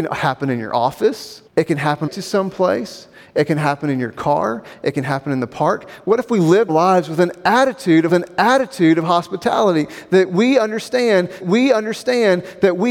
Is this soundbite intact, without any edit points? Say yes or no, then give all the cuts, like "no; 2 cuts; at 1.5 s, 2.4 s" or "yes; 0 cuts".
no; 5 cuts; at 1.5 s, 2.1 s, 6.7 s, 8.1 s, 11.4 s